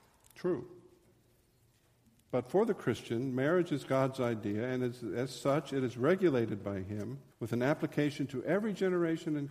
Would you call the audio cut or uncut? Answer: cut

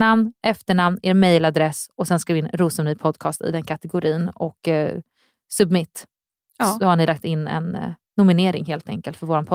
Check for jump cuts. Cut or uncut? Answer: uncut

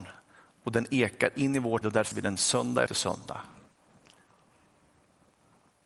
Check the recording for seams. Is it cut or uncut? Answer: cut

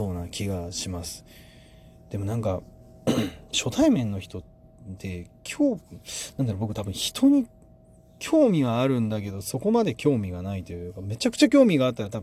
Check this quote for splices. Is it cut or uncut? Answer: uncut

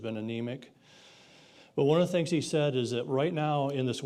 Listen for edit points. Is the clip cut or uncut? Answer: uncut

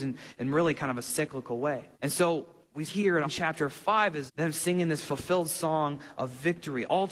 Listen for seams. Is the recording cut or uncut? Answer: cut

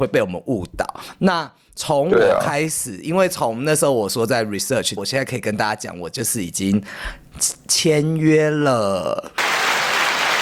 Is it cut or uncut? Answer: cut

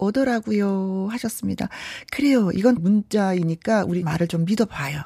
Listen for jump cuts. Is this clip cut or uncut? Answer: cut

